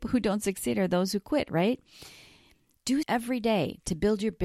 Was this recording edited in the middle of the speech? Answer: yes; 1 cut; at 3.0 s

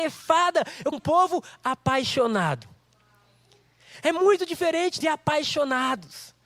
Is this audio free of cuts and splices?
no; 2 cuts; at 0.9 s, 5.0 s

